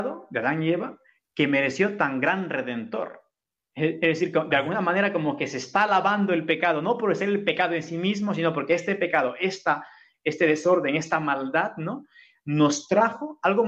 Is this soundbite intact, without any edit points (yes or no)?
yes